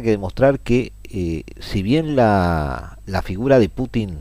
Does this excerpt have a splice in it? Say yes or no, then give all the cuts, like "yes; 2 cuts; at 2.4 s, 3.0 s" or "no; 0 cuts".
no; 0 cuts